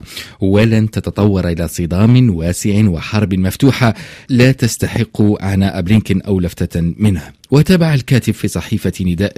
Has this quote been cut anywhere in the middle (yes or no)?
yes